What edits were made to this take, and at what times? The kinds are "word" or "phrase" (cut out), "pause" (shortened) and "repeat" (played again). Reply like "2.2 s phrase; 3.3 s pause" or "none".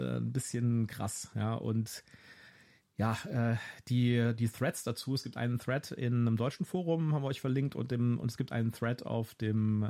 none